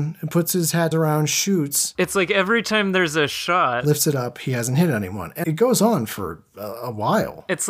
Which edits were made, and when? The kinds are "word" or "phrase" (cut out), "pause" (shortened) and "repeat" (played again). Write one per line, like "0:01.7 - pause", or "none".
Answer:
0:00.9 - phrase
0:05.4 - word